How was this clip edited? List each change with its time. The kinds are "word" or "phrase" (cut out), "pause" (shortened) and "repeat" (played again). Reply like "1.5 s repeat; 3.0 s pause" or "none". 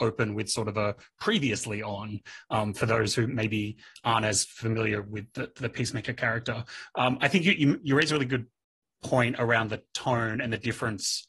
none